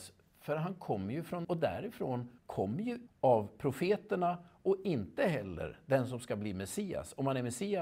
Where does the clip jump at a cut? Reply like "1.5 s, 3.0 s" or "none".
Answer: 1.4 s, 2.4 s, 3.1 s